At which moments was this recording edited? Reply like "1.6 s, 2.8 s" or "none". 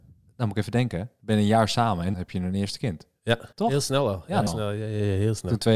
2.1 s, 3.5 s, 4.5 s